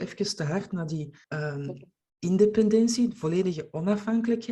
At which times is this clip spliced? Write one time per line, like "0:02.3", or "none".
0:01.2